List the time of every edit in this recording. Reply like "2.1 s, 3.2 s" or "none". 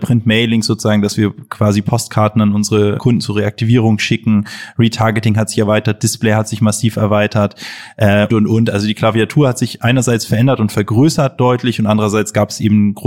3.0 s, 8.3 s